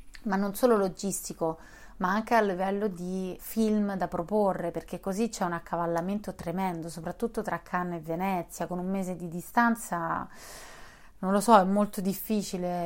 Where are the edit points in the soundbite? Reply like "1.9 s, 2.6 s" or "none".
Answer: 3.4 s